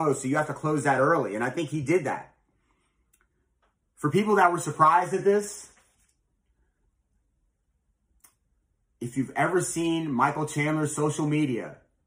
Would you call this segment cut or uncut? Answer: uncut